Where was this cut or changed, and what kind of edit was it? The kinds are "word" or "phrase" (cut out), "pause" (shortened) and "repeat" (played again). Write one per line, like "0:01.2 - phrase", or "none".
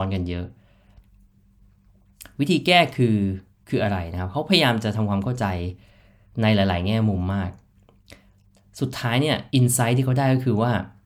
0:09.5 - pause